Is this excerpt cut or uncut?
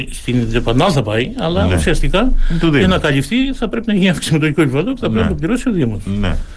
uncut